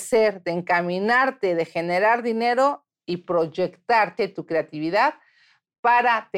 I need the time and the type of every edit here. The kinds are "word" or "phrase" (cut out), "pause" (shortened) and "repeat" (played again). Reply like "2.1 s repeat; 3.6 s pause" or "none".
4.2 s word